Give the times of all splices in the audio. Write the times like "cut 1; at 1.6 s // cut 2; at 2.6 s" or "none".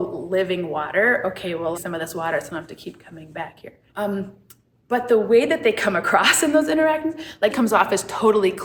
cut 1; at 1.7 s // cut 2; at 3.9 s // cut 3; at 7.5 s